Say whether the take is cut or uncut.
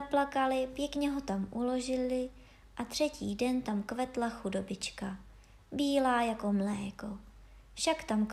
uncut